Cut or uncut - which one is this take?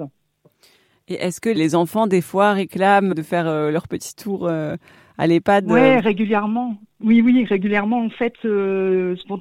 uncut